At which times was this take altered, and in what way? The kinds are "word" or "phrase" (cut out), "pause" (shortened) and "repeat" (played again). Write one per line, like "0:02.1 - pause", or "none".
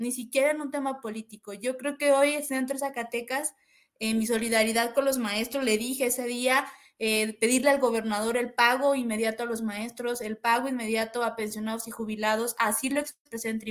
none